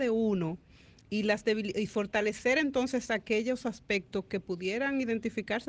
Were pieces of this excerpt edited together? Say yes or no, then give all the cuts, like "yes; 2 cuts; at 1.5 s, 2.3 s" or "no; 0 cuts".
no; 0 cuts